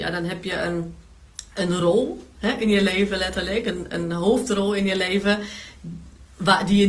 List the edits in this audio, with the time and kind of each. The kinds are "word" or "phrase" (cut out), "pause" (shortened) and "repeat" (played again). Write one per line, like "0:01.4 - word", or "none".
none